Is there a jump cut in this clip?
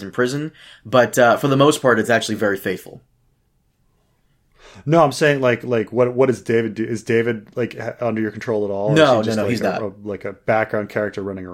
no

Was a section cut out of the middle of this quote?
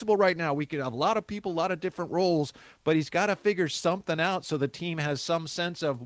no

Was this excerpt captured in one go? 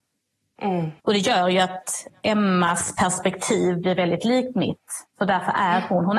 no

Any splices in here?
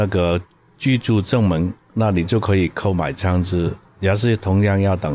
no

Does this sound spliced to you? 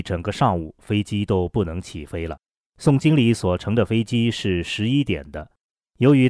yes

